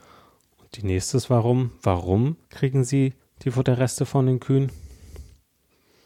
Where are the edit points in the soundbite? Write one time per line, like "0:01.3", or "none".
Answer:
0:02.4
0:03.2